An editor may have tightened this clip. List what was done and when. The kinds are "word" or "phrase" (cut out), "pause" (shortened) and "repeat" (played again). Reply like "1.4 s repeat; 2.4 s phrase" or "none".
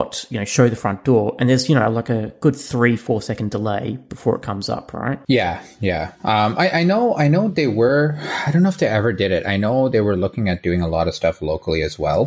none